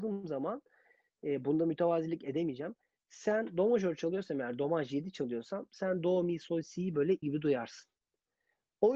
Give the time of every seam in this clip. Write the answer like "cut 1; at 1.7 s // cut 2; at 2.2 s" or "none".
cut 1; at 7.2 s